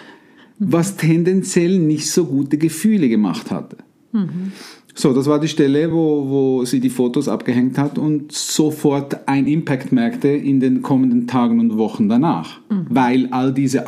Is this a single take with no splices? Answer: yes; 0 cuts

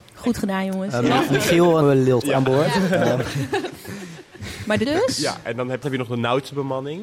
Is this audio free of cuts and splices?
no; 4 cuts; at 1.8 s, 2.2 s, 4.8 s, 5.8 s

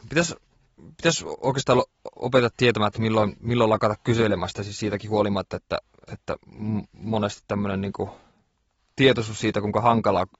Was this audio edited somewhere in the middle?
no; 0 cuts

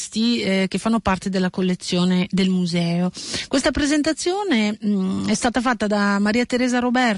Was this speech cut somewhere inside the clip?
no; 0 cuts

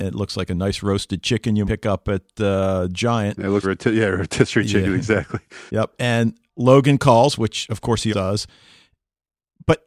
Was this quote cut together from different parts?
yes; 5 cuts; at 1.6 s, 3.6 s, 5.7 s, 6.5 s, 8.1 s

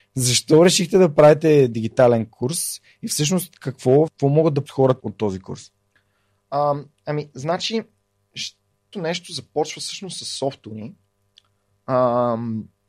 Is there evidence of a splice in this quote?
yes; 4 cuts; at 4.1 s, 4.7 s, 5.0 s, 8.9 s

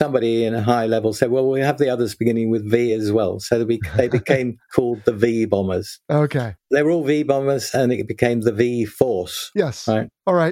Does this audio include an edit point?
no; 0 cuts

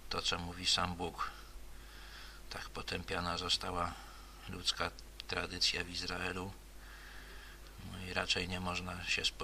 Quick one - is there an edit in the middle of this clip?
no; 0 cuts

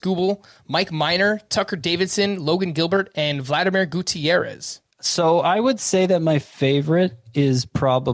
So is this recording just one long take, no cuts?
no; 1 cut; at 4.9 s

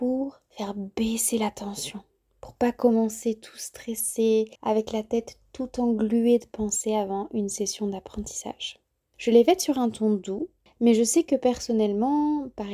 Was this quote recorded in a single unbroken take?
no; 1 cut; at 4.6 s

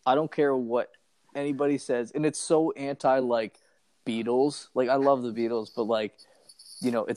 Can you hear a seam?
no; 0 cuts

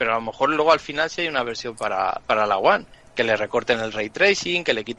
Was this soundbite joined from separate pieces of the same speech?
no; 0 cuts

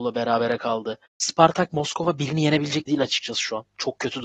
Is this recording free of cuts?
no; 2 cuts; at 1.1 s, 2.9 s

